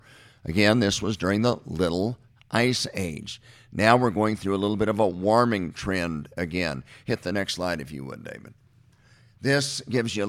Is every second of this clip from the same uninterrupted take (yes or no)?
yes